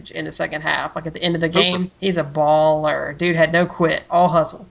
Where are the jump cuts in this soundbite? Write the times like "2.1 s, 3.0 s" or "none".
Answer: 1.9 s